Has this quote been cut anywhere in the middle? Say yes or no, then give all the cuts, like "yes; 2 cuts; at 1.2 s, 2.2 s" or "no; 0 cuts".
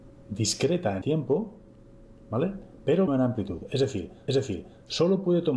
yes; 3 cuts; at 1.0 s, 3.1 s, 4.3 s